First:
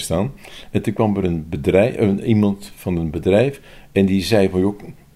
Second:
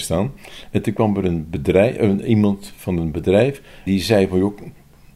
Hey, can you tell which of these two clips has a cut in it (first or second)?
second